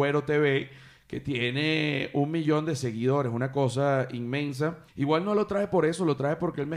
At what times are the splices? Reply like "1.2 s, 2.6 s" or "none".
4.9 s